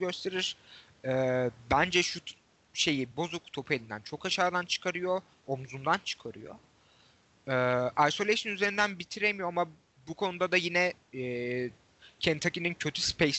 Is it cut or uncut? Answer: cut